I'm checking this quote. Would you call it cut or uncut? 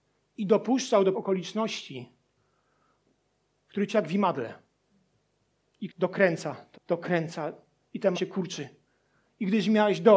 cut